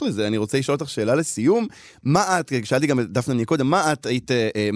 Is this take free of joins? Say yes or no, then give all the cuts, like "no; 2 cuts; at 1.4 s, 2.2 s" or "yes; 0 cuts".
yes; 0 cuts